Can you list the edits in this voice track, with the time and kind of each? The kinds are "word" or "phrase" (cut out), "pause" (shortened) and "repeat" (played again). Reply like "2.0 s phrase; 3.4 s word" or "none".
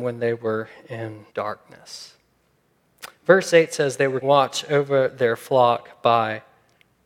1.3 s pause; 4.2 s word